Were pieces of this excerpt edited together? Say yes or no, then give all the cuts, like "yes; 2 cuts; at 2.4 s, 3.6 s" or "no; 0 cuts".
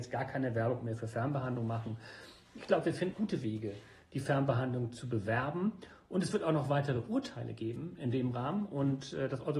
yes; 1 cut; at 3.1 s